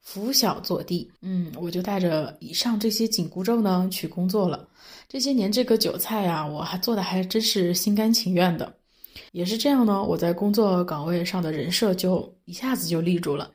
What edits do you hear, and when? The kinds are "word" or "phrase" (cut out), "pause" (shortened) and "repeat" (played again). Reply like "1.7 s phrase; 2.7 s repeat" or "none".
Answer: 1.2 s pause; 9.3 s pause